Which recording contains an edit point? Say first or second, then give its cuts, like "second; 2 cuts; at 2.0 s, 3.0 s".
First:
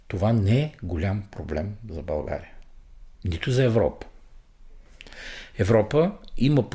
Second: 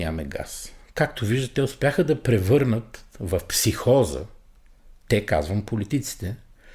first; 1 cut; at 3.1 s